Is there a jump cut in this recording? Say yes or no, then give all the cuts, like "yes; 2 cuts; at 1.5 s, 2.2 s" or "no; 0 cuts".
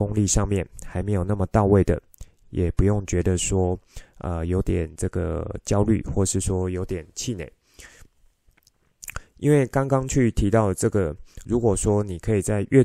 yes; 1 cut; at 11.4 s